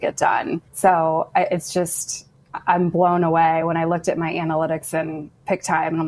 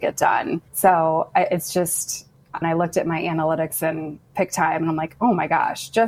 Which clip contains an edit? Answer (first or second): second